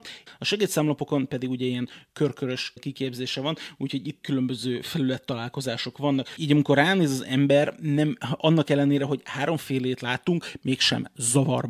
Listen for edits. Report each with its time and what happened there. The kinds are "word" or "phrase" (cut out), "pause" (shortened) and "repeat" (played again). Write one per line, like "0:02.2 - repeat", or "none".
0:04.2 - phrase